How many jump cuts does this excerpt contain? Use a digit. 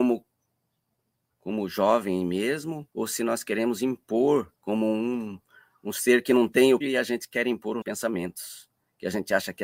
4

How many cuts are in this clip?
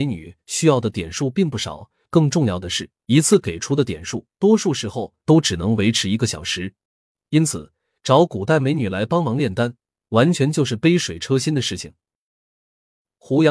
3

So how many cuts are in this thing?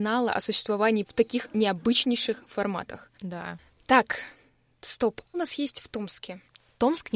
3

